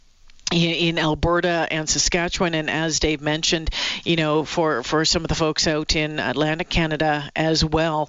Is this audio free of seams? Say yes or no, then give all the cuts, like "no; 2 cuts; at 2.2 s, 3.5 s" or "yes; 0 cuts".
yes; 0 cuts